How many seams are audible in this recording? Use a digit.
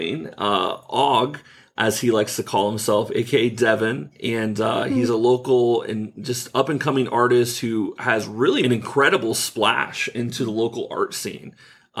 1